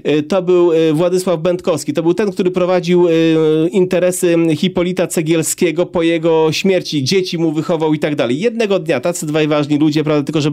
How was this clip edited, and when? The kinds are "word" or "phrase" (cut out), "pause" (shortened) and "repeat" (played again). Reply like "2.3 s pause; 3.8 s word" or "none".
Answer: none